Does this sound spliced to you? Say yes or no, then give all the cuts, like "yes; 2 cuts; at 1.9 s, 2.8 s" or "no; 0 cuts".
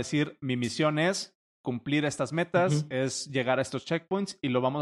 no; 0 cuts